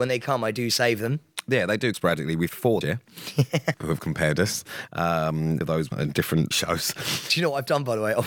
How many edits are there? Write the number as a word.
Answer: seven